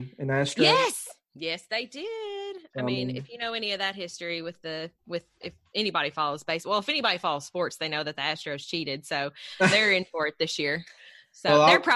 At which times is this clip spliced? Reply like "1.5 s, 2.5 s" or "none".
5.3 s